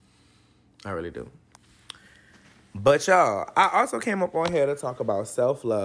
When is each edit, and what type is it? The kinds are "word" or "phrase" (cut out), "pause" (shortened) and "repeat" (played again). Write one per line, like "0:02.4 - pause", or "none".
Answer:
none